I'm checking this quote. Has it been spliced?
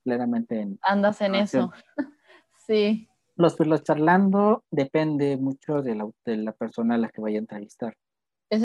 no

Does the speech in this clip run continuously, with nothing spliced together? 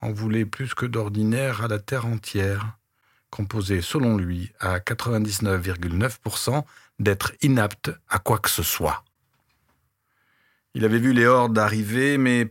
yes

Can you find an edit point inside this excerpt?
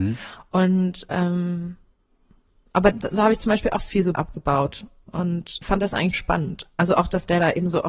yes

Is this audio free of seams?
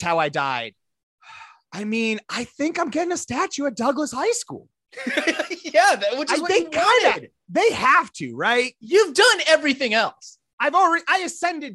yes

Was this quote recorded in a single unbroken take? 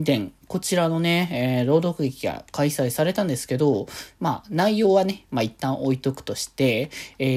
yes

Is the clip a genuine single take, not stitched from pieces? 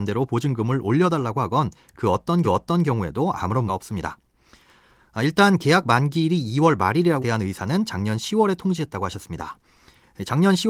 no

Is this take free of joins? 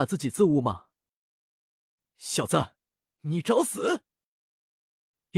yes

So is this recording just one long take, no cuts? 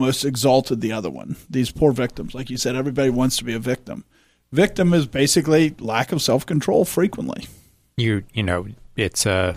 yes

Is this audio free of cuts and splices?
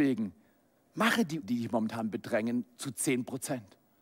no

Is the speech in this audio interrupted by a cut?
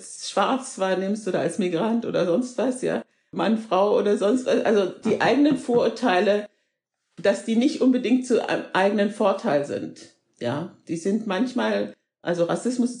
no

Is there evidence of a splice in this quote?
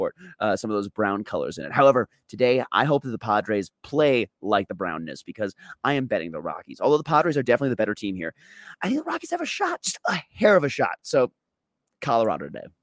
no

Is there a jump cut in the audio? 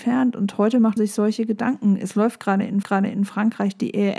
yes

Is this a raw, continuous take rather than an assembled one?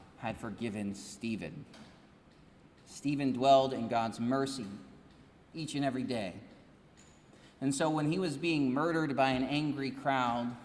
yes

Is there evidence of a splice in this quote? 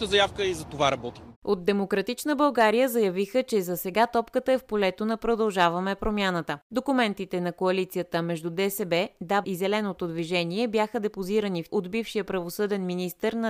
yes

